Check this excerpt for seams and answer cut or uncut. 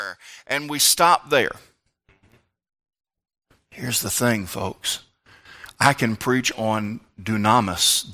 uncut